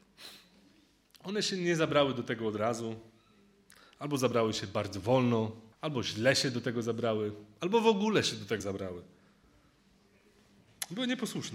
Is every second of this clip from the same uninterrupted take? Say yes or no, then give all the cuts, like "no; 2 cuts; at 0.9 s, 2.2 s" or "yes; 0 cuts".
no; 2 cuts; at 5.7 s, 8.6 s